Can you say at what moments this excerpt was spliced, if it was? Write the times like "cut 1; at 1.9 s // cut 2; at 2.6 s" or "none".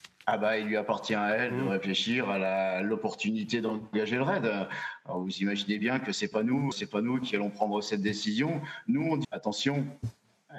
cut 1; at 6.7 s // cut 2; at 9.2 s